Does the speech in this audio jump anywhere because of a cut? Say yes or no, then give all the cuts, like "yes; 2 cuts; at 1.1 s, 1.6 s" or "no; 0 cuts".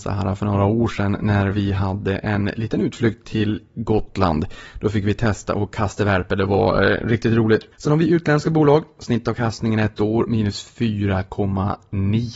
yes; 1 cut; at 7.7 s